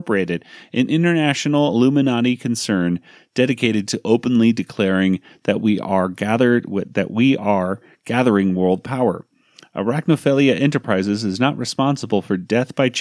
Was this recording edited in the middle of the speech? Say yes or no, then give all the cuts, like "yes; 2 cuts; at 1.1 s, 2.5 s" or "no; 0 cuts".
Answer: no; 0 cuts